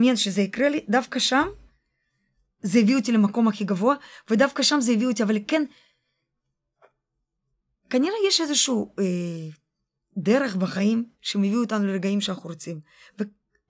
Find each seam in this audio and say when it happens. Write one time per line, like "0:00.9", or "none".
none